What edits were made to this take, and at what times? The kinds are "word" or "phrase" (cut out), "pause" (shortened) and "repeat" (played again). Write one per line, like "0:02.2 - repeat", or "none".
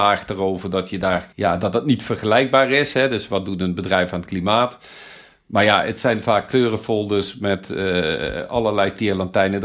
0:01.3 - pause